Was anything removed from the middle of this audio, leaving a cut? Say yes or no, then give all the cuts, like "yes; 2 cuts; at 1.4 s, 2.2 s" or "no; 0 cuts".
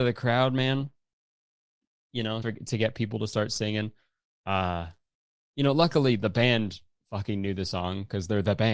yes; 1 cut; at 2.4 s